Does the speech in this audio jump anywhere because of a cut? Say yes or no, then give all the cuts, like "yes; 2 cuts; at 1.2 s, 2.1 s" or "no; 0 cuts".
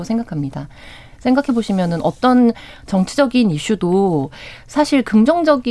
no; 0 cuts